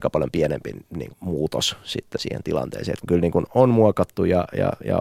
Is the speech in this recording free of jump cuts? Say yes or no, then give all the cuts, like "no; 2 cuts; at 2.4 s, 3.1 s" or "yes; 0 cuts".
no; 4 cuts; at 1.1 s, 2.2 s, 3.0 s, 3.5 s